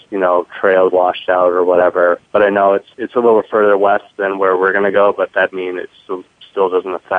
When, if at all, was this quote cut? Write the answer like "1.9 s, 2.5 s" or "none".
0.9 s, 2.2 s, 5.5 s